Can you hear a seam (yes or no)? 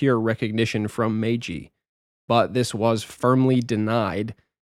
no